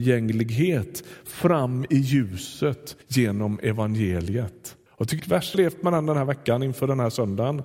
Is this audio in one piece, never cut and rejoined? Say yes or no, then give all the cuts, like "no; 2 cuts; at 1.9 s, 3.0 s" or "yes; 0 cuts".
no; 4 cuts; at 3.0 s, 4.9 s, 5.2 s, 5.5 s